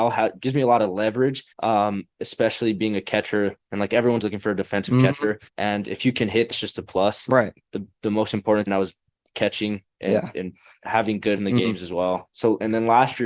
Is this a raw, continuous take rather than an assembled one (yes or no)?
no